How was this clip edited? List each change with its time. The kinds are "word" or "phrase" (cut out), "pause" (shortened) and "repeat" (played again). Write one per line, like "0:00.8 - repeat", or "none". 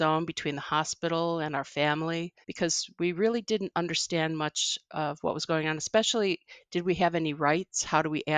0:02.4 - pause